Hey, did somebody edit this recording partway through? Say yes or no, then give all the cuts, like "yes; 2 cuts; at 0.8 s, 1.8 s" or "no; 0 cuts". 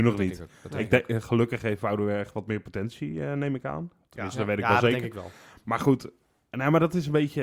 no; 0 cuts